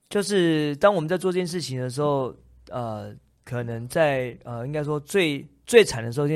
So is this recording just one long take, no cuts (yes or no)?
yes